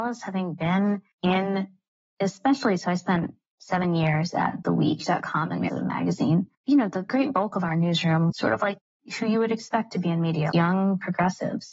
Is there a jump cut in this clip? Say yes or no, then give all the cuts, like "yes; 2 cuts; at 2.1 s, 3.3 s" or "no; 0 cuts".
yes; 5 cuts; at 1.1 s, 5.7 s, 6.5 s, 8.3 s, 10.5 s